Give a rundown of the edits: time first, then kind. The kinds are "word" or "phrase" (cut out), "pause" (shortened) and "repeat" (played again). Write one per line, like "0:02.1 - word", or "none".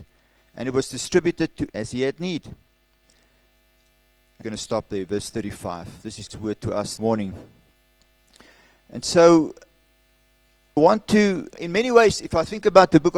0:01.7 - word
0:04.4 - word
0:06.3 - word
0:07.0 - word
0:10.8 - word
0:11.5 - word